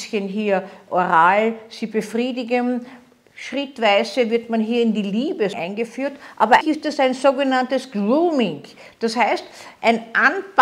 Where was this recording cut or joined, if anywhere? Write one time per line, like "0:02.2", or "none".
0:05.5
0:06.6